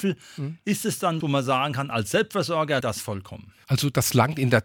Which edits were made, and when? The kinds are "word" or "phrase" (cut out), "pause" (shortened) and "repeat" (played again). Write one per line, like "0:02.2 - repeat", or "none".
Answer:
0:01.2 - word
0:02.8 - word